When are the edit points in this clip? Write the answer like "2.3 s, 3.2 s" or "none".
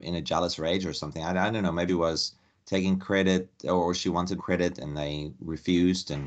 1.9 s, 4.4 s